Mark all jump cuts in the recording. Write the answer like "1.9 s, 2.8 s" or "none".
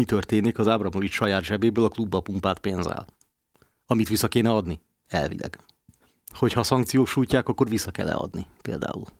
6.0 s